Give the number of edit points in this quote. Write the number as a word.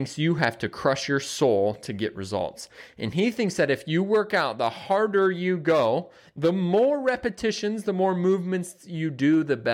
zero